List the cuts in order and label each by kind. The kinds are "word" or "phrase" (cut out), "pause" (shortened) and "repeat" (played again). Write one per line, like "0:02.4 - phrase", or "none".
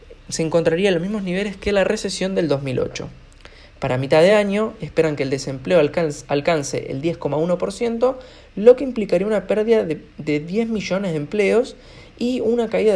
none